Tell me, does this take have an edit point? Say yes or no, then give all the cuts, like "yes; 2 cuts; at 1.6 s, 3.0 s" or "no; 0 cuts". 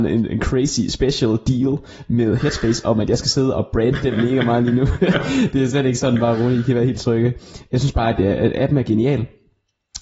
no; 0 cuts